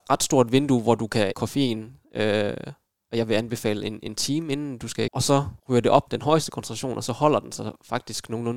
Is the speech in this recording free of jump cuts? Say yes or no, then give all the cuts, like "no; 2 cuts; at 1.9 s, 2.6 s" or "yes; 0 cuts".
no; 4 cuts; at 1.3 s, 5.1 s, 5.6 s, 6.1 s